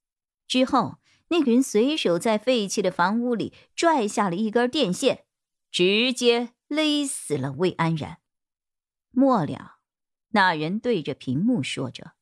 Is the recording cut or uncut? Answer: uncut